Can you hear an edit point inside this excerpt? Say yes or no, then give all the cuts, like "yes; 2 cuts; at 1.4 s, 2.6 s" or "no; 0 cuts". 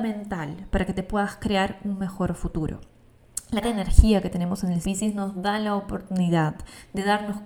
yes; 2 cuts; at 3.6 s, 4.8 s